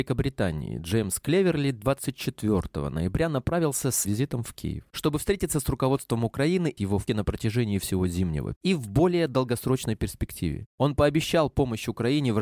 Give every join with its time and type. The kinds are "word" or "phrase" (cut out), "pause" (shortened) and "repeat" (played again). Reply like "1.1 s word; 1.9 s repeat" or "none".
4.1 s word; 6.8 s word; 7.1 s word; 8.6 s word